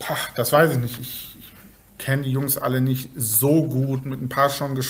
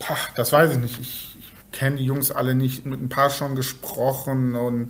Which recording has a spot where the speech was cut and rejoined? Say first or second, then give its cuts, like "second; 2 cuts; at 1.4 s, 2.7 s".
second; 2 cuts; at 1.6 s, 2.8 s